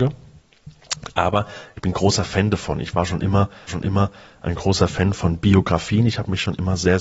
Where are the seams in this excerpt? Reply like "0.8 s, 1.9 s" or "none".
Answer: 3.7 s